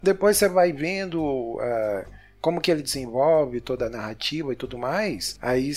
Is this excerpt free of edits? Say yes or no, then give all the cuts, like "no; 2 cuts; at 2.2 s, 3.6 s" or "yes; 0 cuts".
yes; 0 cuts